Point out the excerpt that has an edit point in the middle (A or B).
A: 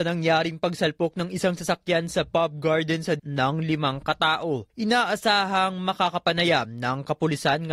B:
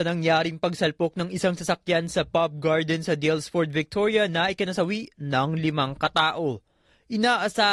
A